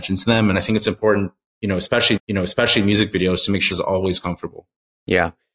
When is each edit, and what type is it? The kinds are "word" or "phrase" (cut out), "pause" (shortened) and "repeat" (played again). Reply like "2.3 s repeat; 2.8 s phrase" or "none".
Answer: 2.2 s repeat; 3.7 s phrase